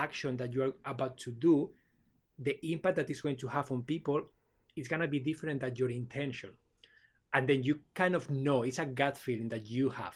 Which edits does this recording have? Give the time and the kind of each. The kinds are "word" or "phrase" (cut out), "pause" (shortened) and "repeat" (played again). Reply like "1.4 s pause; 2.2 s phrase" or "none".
none